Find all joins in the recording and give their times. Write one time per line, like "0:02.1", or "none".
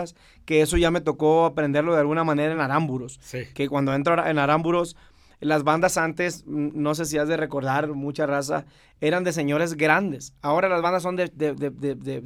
none